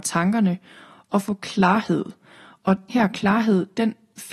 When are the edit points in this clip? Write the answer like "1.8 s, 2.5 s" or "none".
2.9 s